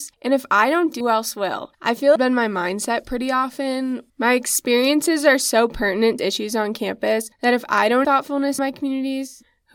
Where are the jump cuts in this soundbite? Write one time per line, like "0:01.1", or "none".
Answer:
0:01.0
0:02.2
0:04.1
0:06.2
0:08.0
0:08.6